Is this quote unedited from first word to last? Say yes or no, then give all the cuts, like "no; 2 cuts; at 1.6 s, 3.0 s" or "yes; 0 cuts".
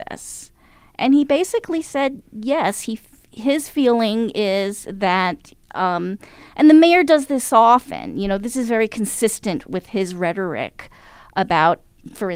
yes; 0 cuts